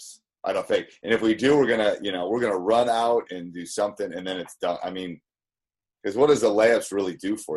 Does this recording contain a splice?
no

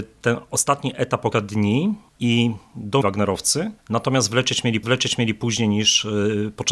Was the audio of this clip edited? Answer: yes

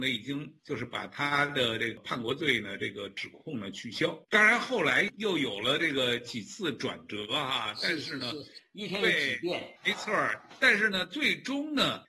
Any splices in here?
yes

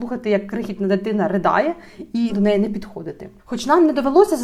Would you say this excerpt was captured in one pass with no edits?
no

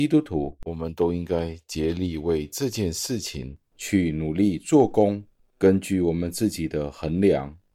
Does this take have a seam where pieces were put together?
no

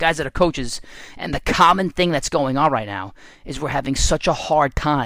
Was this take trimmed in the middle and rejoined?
no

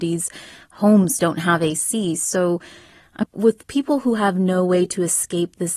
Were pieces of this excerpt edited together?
yes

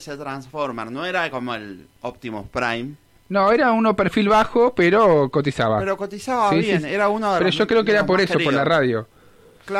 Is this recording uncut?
yes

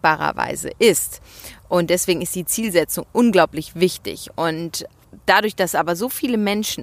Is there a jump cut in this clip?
no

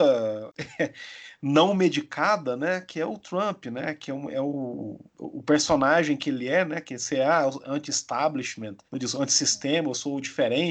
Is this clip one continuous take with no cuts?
no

